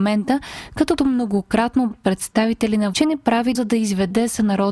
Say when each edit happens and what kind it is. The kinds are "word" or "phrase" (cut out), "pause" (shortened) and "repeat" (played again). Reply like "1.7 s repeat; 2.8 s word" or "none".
1.0 s word; 1.9 s phrase; 2.9 s word; 3.5 s word